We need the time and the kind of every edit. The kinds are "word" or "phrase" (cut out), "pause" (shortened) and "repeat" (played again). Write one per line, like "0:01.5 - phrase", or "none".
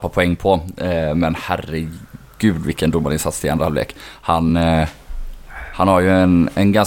none